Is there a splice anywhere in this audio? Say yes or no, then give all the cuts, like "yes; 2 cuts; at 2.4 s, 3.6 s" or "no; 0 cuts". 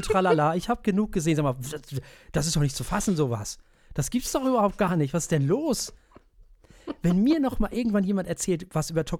no; 0 cuts